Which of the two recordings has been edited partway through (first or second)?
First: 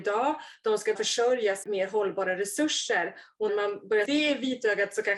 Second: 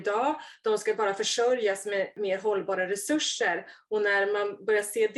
first